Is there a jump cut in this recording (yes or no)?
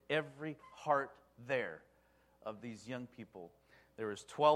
no